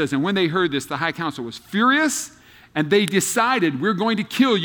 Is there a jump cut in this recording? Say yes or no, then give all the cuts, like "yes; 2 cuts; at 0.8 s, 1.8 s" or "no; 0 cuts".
no; 0 cuts